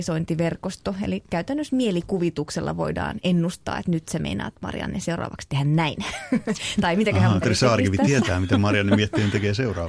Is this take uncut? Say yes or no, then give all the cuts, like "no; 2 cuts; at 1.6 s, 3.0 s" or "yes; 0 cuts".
no; 1 cut; at 7.4 s